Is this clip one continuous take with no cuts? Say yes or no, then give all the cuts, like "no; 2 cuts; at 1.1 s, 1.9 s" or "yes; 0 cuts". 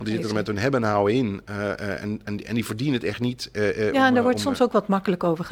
yes; 0 cuts